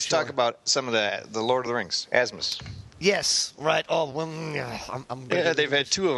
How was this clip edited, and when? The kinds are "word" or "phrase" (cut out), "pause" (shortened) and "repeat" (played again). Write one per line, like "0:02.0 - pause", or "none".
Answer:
none

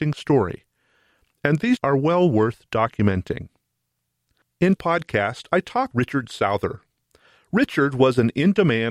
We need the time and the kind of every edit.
0:01.8 - word
0:04.8 - word
0:05.9 - word

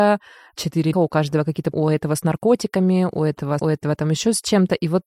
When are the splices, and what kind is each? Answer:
0:00.9 - word
0:01.7 - word
0:03.6 - word

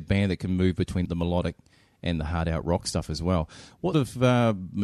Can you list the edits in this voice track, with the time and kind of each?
0:01.0 - word
0:03.9 - word

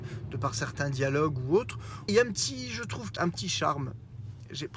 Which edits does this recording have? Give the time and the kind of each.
0:02.1 - word
0:03.2 - phrase

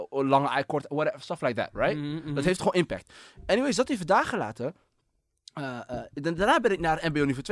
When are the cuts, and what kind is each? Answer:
none

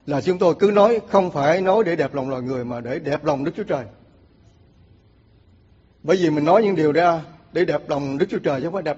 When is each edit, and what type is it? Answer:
none

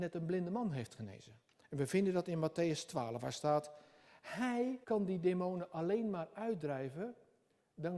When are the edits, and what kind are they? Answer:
0:01.5 - pause
0:04.8 - pause

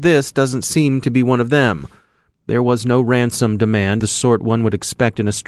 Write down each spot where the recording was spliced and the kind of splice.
0:04.0 - word

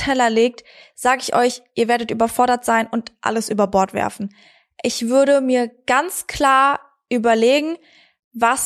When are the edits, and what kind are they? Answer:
none

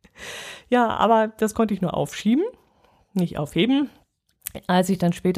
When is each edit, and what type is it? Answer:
none

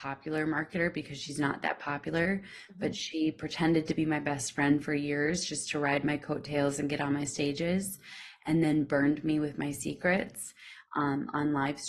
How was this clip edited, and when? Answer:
none

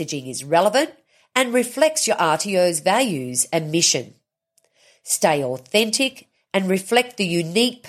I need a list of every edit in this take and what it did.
none

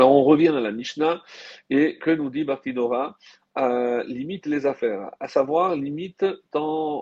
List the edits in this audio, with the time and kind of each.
none

